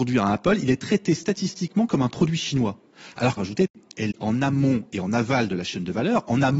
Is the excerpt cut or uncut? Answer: cut